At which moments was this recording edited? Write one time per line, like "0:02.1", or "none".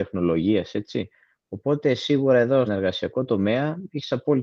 0:02.7